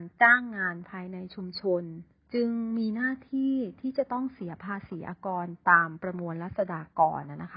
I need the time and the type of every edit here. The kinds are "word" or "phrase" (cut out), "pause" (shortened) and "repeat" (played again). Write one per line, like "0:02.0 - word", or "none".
0:02.1 - pause